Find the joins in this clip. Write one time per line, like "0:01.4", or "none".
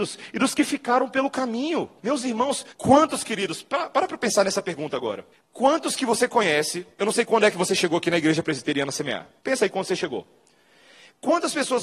0:02.0
0:02.7
0:05.3
0:06.9
0:09.4